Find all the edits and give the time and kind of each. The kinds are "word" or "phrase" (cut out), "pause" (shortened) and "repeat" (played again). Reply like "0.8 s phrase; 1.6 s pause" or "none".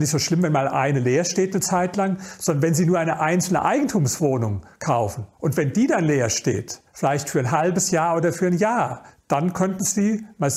5.3 s pause; 6.9 s pause; 9.1 s pause